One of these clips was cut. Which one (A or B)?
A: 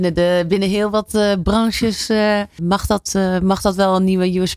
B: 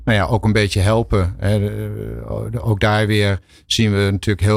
A